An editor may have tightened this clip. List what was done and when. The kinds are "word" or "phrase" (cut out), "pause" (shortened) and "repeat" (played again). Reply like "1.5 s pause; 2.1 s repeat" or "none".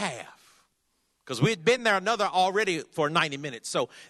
none

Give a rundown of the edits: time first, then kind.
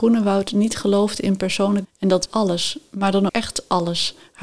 1.8 s word; 2.3 s word; 3.3 s word

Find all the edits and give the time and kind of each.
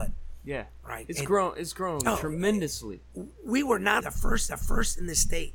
4.0 s word; 4.5 s repeat

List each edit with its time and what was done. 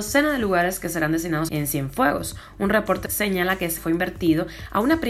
1.5 s phrase; 3.1 s phrase; 3.8 s word

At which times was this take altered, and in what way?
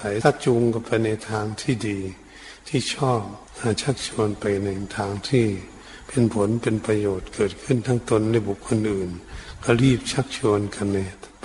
3.5 s pause

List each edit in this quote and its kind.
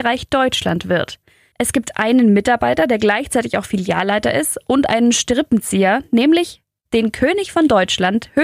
none

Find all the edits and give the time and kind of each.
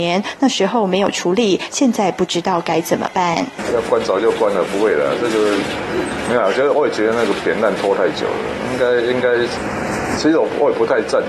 none

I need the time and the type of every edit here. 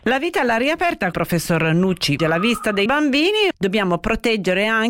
1.1 s word; 2.2 s word; 2.9 s word; 3.5 s word

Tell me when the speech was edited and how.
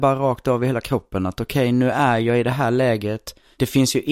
none

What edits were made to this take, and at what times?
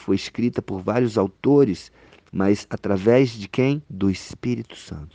3.9 s pause

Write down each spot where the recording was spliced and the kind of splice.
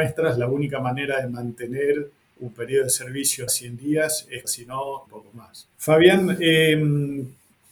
2.2 s pause; 3.5 s phrase; 4.4 s phrase; 5.1 s phrase; 5.7 s pause

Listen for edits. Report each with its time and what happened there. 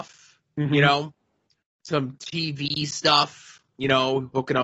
none

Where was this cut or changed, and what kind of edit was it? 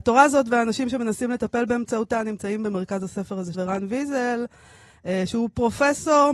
3.5 s word

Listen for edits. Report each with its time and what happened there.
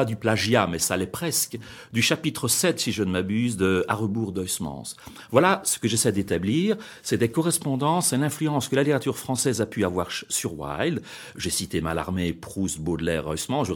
none

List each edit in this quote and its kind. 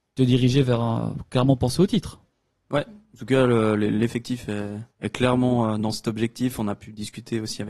2.3 s pause; 4.9 s pause

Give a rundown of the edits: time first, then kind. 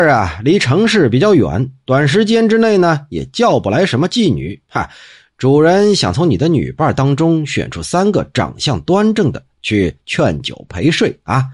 none

